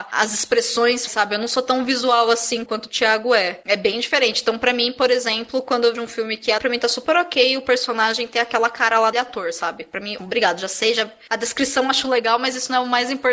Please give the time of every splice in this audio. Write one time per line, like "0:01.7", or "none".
0:01.1
0:02.7
0:05.9
0:06.6
0:09.1
0:10.2